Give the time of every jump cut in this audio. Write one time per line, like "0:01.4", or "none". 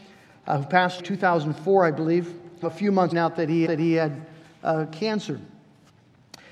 0:01.0
0:02.6
0:03.1
0:03.7